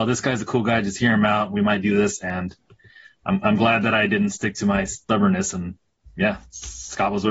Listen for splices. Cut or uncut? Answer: uncut